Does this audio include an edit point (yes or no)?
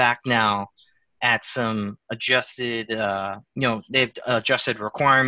yes